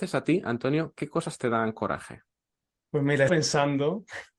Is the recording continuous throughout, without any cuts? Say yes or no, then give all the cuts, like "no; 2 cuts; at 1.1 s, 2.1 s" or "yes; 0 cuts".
no; 2 cuts; at 2.5 s, 3.3 s